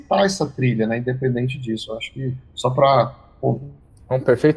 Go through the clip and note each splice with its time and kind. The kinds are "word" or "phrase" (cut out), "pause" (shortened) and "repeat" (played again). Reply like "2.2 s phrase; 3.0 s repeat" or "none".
none